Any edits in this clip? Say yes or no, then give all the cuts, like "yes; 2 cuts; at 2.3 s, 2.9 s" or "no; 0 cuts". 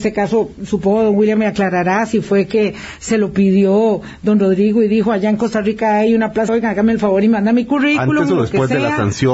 yes; 1 cut; at 6.5 s